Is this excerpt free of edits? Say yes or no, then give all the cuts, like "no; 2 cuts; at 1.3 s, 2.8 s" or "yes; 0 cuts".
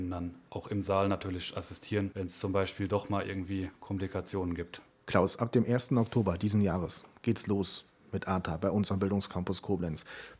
yes; 0 cuts